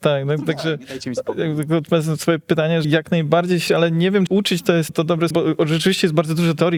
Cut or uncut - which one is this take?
cut